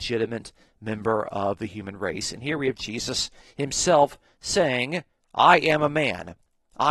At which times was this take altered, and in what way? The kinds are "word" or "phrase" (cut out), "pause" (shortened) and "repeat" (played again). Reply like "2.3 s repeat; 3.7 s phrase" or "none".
none

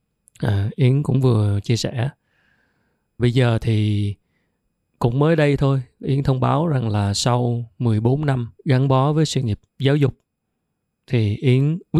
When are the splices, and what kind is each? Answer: 3.2 s word; 6.0 s word; 8.6 s pause

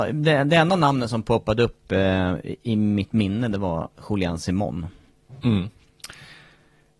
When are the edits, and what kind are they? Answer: none

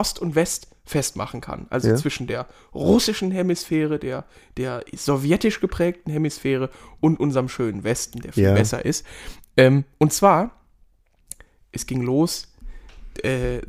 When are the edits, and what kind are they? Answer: none

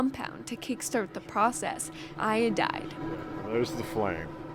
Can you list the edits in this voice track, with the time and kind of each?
2.1 s word

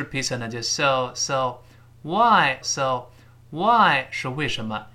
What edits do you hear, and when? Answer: 2.6 s repeat

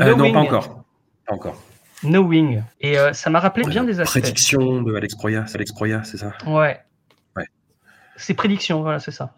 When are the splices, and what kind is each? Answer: 2.7 s pause; 3.6 s phrase; 5.5 s repeat

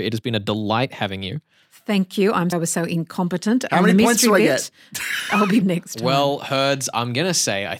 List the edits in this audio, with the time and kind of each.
2.5 s word; 5.6 s word

